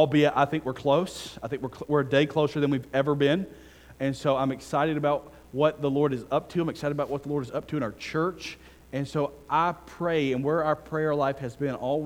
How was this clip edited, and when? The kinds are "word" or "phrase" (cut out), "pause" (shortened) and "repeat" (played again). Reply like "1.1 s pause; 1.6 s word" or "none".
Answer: none